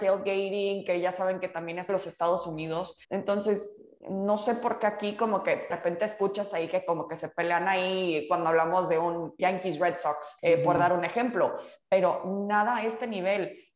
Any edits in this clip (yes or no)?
yes